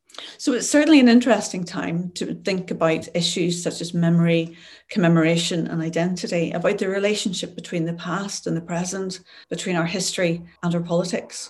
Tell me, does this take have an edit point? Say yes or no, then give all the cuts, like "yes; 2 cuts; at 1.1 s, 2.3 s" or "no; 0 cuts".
yes; 2 cuts; at 9.4 s, 10.6 s